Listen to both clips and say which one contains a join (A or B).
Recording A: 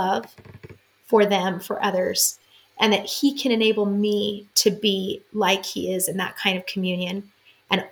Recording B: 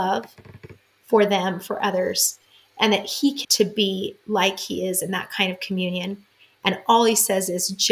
B